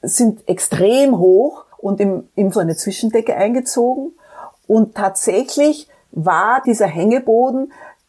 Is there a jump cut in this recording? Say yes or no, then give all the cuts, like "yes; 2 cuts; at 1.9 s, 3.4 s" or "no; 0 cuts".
yes; 3 cuts; at 1.7 s, 2.5 s, 6.6 s